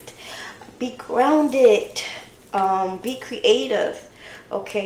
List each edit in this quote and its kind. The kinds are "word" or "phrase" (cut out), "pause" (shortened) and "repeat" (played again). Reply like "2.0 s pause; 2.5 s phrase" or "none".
none